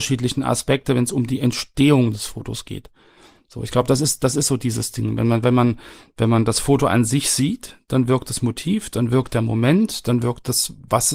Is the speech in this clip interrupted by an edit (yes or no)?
no